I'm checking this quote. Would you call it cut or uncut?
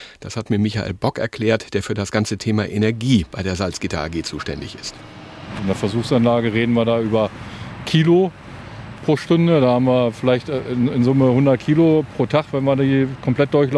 uncut